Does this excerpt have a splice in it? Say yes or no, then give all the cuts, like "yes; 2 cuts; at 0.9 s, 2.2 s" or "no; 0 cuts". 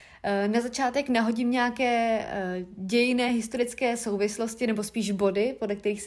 no; 0 cuts